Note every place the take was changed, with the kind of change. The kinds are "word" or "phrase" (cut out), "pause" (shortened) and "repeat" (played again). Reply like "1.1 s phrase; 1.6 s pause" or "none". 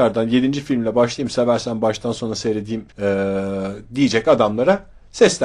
2.9 s pause